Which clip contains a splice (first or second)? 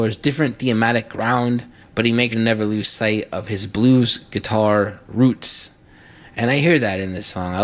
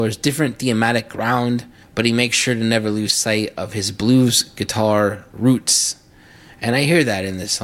first